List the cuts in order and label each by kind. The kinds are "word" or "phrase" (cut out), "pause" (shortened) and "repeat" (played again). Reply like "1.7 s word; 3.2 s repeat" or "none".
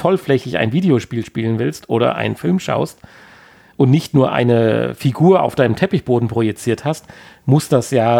none